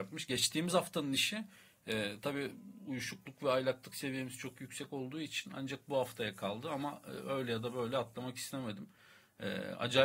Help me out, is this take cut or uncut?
uncut